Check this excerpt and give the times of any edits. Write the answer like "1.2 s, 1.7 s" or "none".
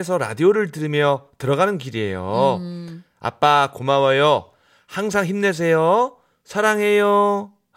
none